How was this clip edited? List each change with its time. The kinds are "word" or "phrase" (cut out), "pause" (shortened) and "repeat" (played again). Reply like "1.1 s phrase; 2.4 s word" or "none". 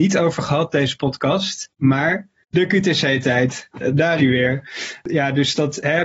4.2 s word